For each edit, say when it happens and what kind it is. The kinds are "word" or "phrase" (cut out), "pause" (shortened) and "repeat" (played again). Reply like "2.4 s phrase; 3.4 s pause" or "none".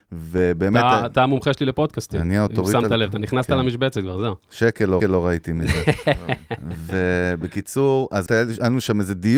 5.0 s repeat; 8.3 s word